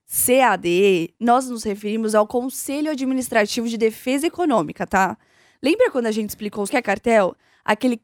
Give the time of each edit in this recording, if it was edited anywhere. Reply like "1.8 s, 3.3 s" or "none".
6.7 s